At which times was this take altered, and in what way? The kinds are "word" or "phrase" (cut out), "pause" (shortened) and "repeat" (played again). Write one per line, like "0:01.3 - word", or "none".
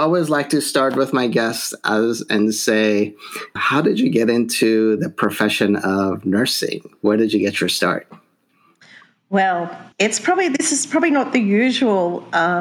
0:03.6 - word
0:09.9 - pause